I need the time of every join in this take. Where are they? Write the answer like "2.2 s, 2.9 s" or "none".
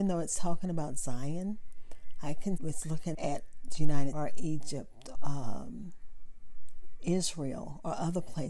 2.6 s, 3.1 s, 4.1 s, 5.1 s